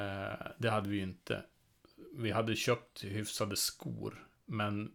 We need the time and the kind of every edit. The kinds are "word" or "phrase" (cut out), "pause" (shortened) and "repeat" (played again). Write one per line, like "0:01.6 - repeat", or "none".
none